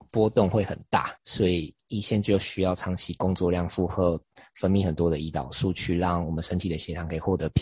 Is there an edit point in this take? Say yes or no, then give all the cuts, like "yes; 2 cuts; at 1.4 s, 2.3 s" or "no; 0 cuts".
yes; 1 cut; at 1.2 s